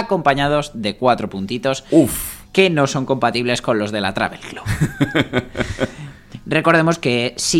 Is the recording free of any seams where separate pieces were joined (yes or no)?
no